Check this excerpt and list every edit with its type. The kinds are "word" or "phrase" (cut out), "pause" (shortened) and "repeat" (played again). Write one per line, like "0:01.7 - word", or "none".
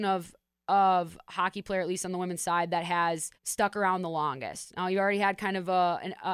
0:03.3 - pause